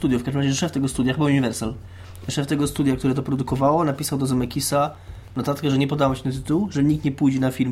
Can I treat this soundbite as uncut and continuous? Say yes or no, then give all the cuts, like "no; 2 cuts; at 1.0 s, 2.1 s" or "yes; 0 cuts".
yes; 0 cuts